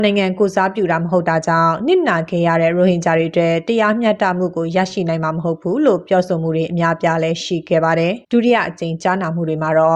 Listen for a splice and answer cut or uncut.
cut